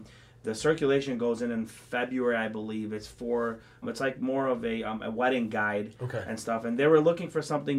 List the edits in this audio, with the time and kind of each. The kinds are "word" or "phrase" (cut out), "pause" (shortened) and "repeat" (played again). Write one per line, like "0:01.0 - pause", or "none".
0:03.8 - word